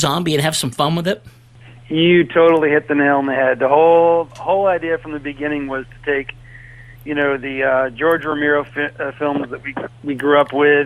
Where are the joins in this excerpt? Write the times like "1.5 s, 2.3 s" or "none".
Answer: none